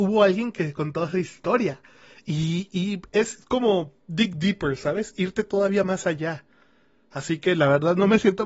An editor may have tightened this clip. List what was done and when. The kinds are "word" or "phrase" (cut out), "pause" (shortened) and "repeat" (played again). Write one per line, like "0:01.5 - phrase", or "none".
none